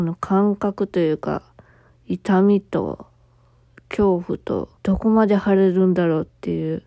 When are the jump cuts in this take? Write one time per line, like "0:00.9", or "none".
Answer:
0:04.8

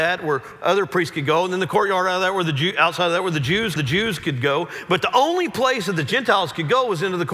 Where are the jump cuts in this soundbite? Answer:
0:03.8

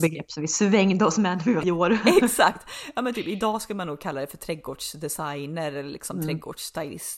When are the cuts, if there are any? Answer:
0:01.6

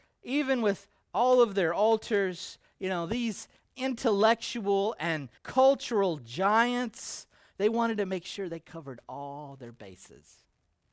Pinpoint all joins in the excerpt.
0:05.4

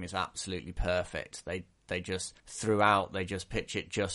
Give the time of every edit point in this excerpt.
0:02.4

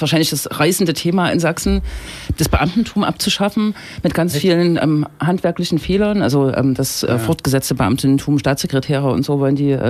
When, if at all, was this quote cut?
none

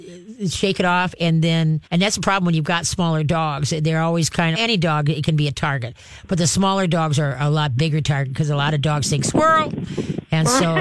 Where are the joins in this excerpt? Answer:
0:01.9
0:04.5

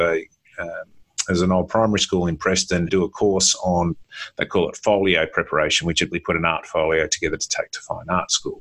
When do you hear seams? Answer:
0:02.9
0:06.1

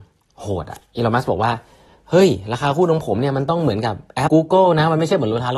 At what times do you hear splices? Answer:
0:04.3

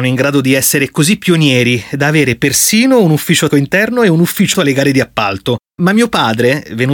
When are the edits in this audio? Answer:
0:03.5
0:04.5

